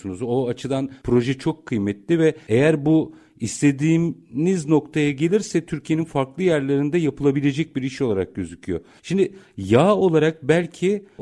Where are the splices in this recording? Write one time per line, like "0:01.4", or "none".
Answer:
none